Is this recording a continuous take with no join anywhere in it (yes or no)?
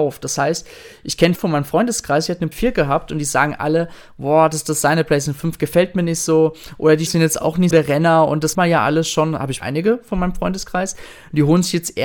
no